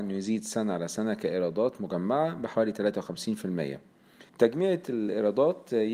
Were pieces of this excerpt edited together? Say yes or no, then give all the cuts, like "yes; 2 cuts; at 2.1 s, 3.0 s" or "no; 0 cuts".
yes; 1 cut; at 4.3 s